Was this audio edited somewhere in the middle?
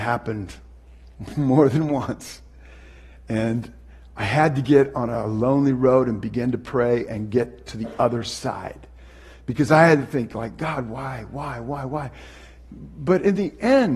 no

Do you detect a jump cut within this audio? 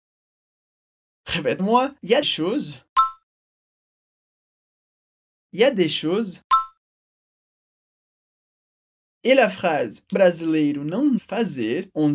yes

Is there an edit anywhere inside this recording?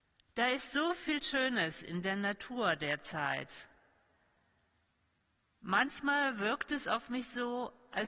no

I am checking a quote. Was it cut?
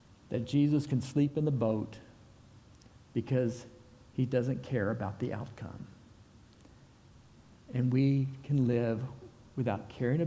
no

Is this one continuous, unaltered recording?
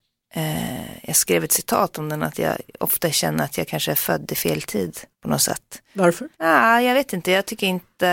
no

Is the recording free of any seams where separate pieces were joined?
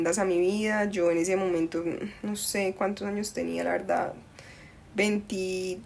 yes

